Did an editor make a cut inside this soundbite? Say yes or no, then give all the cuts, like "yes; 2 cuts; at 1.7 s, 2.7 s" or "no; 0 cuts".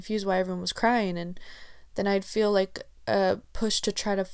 no; 0 cuts